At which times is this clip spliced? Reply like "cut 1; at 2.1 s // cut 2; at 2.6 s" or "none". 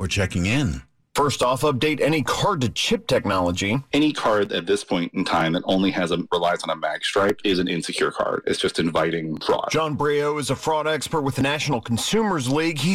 none